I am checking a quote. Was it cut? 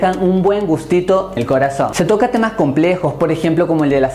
yes; 1 cut; at 1.4 s

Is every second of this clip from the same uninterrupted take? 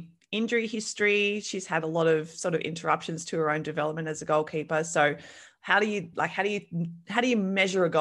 yes; 0 cuts

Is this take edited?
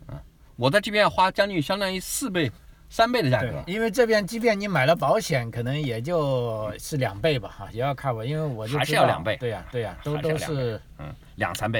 yes; 1 cut; at 9.7 s

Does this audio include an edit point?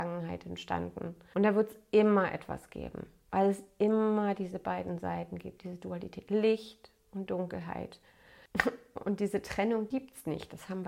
no; 0 cuts

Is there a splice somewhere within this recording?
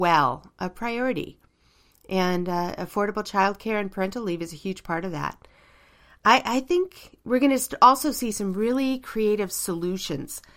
no; 0 cuts

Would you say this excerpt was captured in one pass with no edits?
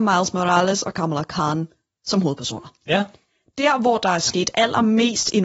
yes; 0 cuts

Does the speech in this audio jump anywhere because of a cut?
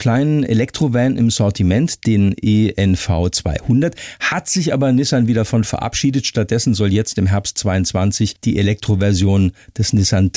no; 0 cuts

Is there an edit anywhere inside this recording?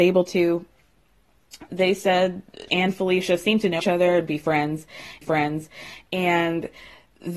yes; 4 cuts; at 1.7 s, 2.7 s, 3.8 s, 5.2 s

